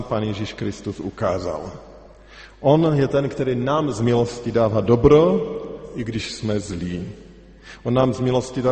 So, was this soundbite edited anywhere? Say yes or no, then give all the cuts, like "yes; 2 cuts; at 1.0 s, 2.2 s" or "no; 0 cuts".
no; 0 cuts